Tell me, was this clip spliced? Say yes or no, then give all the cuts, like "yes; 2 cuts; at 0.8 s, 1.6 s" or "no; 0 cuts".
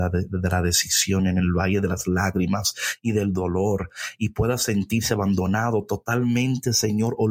no; 0 cuts